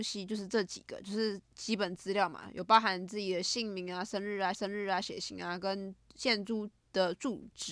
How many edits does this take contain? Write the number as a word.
two